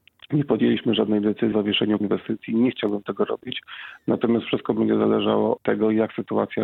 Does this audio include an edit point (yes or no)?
yes